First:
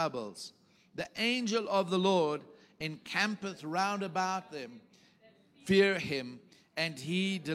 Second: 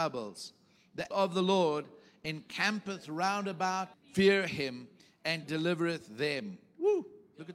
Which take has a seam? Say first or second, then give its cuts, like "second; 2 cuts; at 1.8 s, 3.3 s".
second; 3 cuts; at 1.1 s, 3.9 s, 5.4 s